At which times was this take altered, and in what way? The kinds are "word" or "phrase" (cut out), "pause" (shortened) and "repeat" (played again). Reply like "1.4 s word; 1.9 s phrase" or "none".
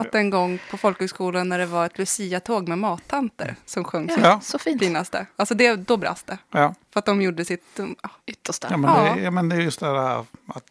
8.2 s pause

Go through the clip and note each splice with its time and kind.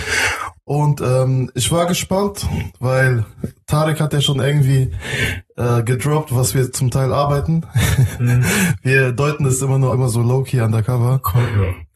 9.9 s phrase

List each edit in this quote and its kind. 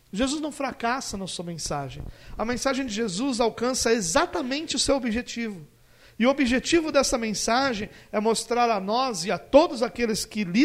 none

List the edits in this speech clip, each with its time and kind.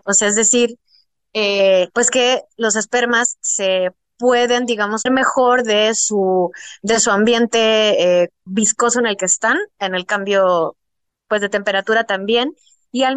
1.9 s pause; 5.1 s phrase; 8.5 s word

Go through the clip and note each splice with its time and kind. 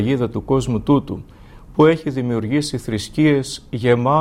none

